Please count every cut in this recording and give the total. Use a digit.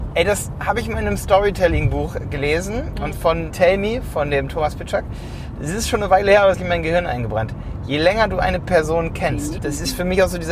4